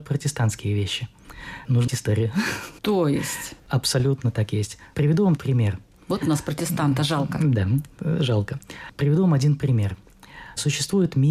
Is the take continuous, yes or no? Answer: no